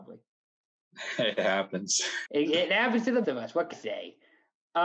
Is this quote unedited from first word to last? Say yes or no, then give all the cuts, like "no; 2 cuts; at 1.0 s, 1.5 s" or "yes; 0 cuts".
no; 3 cuts; at 2.2 s, 3.2 s, 3.7 s